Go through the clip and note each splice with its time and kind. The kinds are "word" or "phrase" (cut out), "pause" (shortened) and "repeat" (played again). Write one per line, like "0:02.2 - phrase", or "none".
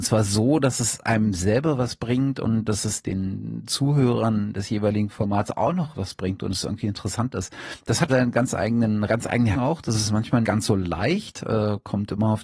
0:03.0 - word
0:05.9 - word
0:08.1 - word
0:09.1 - word
0:09.5 - word
0:10.4 - word